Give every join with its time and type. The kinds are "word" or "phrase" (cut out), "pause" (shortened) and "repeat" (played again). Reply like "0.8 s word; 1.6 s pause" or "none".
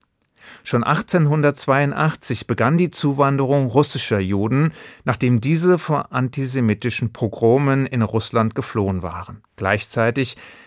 9.5 s pause